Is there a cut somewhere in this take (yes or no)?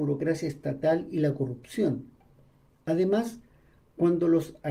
no